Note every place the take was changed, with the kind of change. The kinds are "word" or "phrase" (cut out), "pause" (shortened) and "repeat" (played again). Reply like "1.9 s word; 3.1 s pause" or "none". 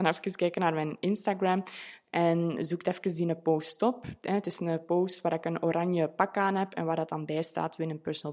none